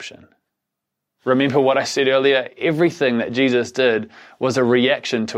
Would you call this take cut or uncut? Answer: uncut